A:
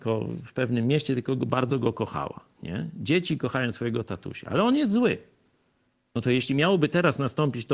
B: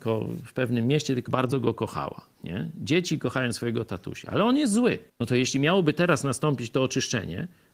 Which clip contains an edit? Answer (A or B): B